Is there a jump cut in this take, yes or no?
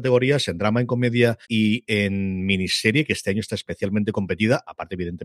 yes